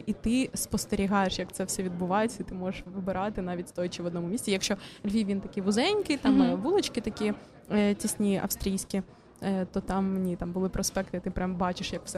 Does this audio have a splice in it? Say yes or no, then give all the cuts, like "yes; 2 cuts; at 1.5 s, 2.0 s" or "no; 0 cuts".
no; 0 cuts